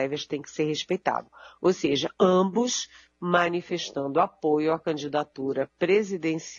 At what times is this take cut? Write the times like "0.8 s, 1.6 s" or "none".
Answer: none